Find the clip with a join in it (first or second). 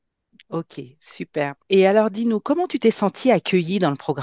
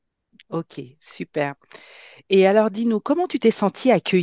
first